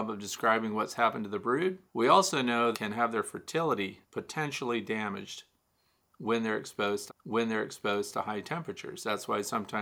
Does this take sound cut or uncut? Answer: cut